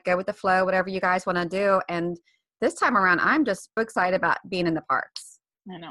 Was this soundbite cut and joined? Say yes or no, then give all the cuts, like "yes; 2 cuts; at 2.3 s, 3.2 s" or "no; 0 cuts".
yes; 1 cut; at 3.8 s